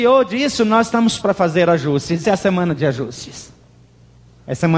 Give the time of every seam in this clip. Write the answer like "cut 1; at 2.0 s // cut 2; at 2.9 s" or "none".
cut 1; at 1.2 s // cut 2; at 2.2 s